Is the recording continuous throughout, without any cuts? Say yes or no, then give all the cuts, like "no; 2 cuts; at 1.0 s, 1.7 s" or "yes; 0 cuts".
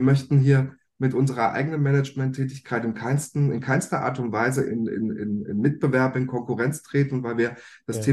yes; 0 cuts